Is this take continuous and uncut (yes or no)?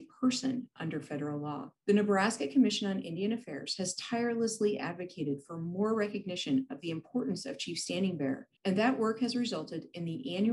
no